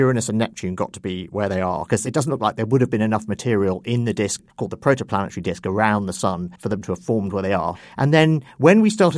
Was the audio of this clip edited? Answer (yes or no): yes